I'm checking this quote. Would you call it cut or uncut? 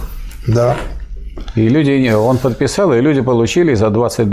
uncut